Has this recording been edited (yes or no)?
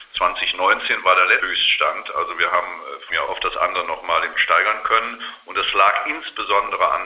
yes